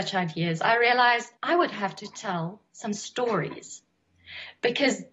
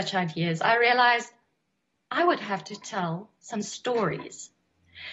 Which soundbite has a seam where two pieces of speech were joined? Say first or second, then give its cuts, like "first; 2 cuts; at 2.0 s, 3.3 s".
first; 1 cut; at 1.4 s